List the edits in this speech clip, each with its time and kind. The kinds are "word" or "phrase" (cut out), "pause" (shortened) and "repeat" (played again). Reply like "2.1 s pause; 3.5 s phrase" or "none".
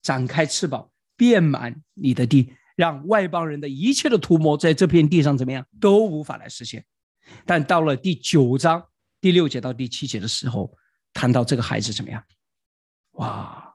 5.7 s pause; 9.0 s pause